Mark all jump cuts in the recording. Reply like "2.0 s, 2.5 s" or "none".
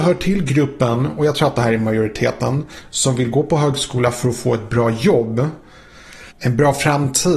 6.3 s